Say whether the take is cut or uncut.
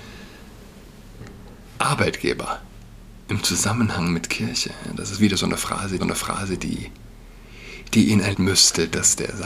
cut